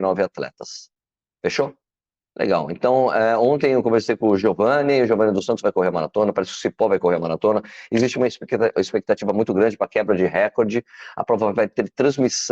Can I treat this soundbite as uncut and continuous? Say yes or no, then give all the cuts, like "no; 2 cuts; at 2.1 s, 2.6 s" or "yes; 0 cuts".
yes; 0 cuts